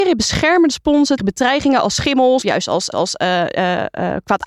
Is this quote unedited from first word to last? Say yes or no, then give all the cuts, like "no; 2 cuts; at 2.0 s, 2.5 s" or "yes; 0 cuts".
no; 3 cuts; at 1.2 s, 2.4 s, 2.9 s